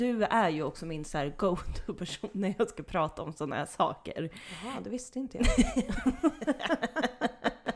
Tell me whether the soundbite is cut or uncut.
uncut